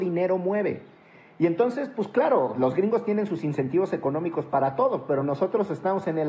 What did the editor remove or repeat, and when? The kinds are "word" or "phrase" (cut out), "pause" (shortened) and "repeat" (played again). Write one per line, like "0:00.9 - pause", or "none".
none